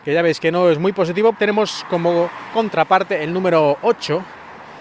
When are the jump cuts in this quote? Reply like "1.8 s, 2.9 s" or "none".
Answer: 1.3 s